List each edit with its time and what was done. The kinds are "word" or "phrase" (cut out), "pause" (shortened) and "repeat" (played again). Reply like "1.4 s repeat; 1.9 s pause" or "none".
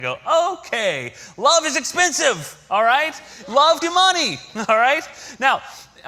3.8 s word

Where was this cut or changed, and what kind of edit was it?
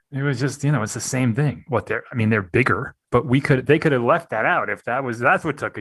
3.0 s pause

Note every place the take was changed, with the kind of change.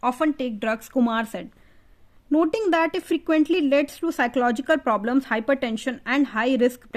none

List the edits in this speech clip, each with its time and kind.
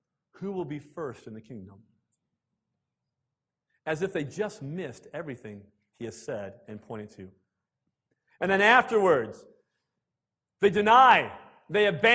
none

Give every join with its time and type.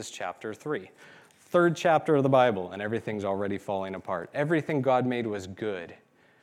none

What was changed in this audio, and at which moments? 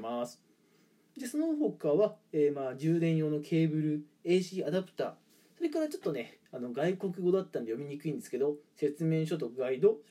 6.5 s pause

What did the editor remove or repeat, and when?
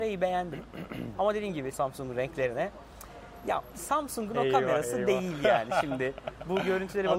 1.7 s phrase; 3.7 s word

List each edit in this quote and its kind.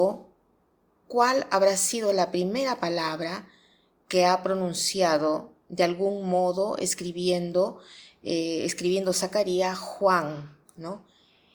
none

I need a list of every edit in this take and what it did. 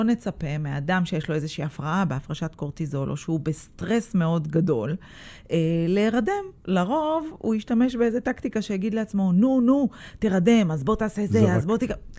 6.6 s pause

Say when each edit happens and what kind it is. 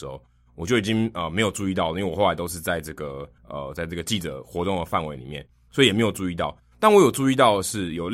3.4 s pause

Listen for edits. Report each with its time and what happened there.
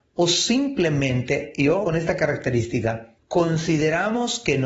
1.8 s word; 3.2 s pause

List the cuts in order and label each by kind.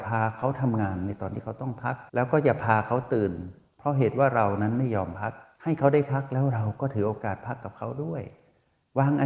2.1 s pause

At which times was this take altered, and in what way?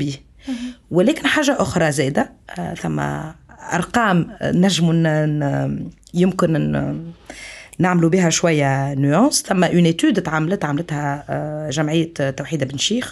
none

